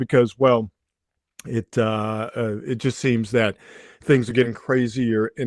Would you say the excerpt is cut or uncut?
uncut